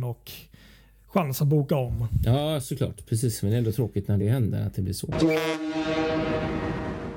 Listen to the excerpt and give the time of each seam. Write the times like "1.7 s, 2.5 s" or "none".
none